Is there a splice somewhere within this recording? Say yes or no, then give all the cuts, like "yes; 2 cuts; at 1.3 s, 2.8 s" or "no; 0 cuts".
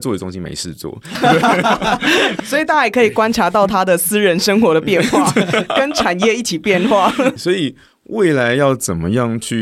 yes; 2 cuts; at 2.4 s, 7.4 s